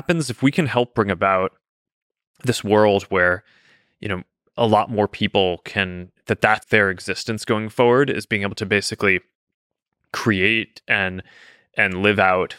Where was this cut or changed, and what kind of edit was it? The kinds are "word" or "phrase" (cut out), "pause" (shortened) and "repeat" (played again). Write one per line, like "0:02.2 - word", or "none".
0:06.6 - word